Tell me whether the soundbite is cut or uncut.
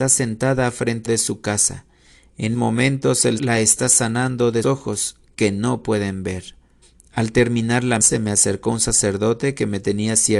cut